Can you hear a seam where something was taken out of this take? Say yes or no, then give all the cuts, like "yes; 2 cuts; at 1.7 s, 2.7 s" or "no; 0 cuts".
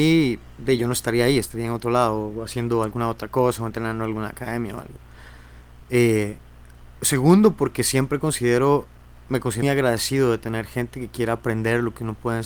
yes; 1 cut; at 9.6 s